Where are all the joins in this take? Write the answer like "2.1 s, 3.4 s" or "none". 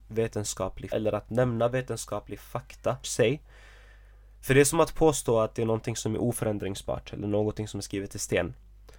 0.9 s, 3.0 s

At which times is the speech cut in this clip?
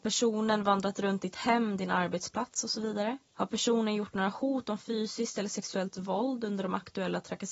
3.2 s

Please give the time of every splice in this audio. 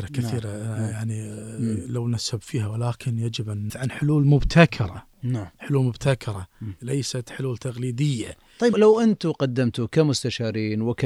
3.7 s, 5.5 s, 8.7 s

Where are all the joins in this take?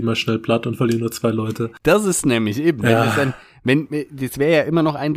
none

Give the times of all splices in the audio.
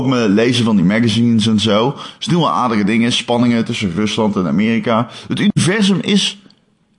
none

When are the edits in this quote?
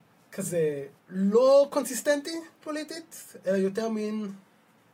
1.0 s, 2.6 s

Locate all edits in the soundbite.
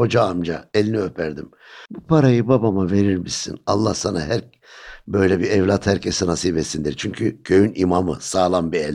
1.9 s

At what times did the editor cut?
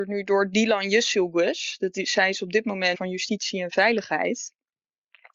2.9 s

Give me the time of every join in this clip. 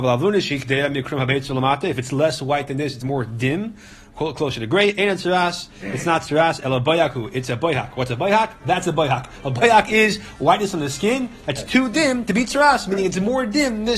3.0 s

